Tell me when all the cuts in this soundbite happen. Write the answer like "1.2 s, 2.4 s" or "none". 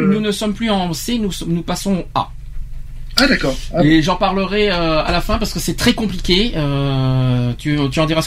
none